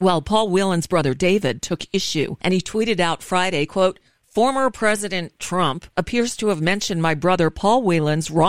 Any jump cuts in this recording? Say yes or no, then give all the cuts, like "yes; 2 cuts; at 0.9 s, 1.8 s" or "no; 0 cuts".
no; 0 cuts